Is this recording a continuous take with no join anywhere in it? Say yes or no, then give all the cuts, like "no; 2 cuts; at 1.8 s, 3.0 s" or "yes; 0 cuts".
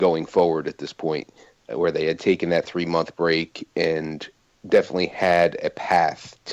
yes; 0 cuts